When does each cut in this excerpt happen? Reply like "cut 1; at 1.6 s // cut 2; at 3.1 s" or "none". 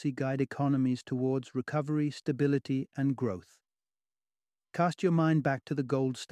none